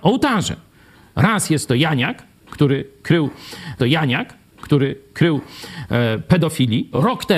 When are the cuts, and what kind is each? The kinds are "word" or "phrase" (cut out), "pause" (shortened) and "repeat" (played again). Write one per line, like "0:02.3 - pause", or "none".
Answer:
0:03.8 - repeat